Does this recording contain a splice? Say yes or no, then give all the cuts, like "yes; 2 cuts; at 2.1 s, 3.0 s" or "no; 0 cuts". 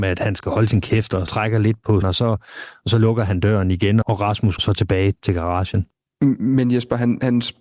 yes; 4 cuts; at 1.3 s, 2.0 s, 4.0 s, 4.6 s